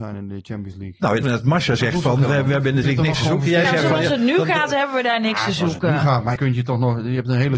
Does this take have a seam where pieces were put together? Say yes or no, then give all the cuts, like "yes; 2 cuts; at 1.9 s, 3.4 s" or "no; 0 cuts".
yes; 3 cuts; at 1.2 s, 2.8 s, 6.4 s